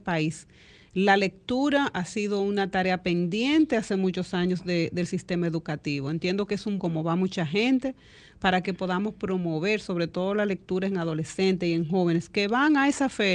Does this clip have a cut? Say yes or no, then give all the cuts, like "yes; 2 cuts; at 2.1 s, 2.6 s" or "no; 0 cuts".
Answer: yes; 1 cut; at 6.8 s